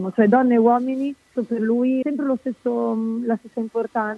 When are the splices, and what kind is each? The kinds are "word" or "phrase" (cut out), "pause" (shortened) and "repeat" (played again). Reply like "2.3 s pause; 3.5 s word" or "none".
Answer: 1.3 s phrase; 2.0 s word